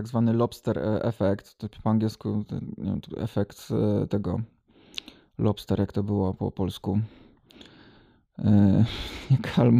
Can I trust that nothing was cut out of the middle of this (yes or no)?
yes